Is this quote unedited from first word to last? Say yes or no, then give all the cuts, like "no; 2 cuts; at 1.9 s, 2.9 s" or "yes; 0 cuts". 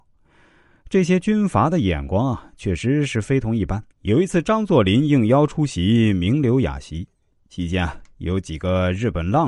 no; 1 cut; at 3.9 s